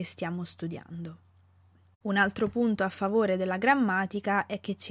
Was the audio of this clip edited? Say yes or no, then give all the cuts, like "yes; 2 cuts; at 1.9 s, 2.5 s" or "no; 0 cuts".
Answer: no; 0 cuts